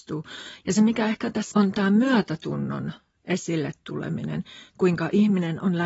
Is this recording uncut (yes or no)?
no